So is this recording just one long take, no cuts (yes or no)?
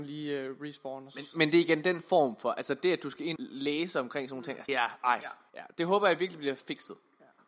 no